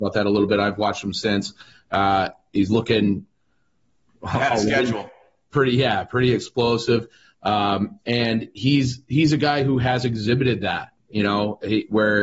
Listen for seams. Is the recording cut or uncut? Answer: uncut